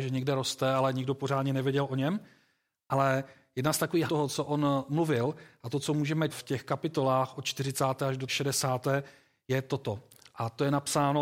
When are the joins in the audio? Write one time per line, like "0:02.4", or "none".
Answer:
0:04.1
0:06.3
0:08.3